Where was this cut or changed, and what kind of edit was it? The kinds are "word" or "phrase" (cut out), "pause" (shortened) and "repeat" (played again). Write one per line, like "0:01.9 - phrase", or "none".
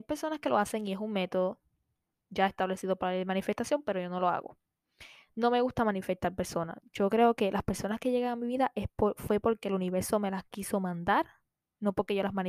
none